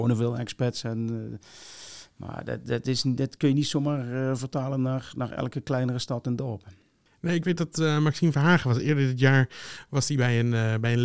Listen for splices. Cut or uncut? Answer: uncut